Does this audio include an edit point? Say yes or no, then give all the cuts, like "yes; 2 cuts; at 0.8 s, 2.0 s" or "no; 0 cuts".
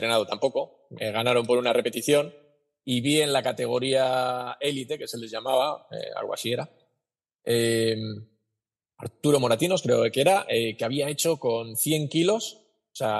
no; 0 cuts